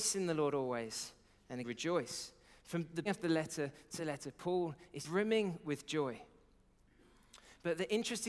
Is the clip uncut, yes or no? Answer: no